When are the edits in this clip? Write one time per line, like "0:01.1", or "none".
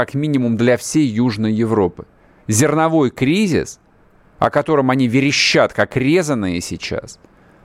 none